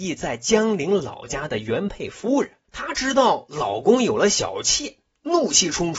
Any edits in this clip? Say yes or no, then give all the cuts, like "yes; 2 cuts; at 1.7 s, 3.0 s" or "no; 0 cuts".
no; 0 cuts